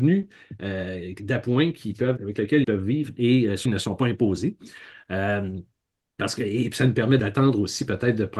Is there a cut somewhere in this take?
yes; 4 cuts; at 2.2 s, 2.6 s, 3.7 s, 7.2 s

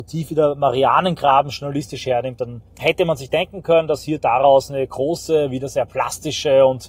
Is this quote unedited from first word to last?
no; 1 cut; at 2.7 s

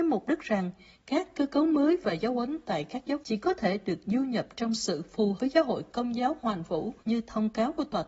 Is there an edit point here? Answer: yes; 3 cuts; at 3.2 s, 5.4 s, 7.0 s

